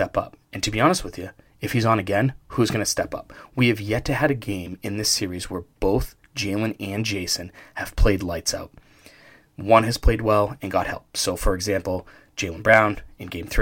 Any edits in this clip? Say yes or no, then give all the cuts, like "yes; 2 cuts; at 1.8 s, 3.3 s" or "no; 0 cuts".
no; 0 cuts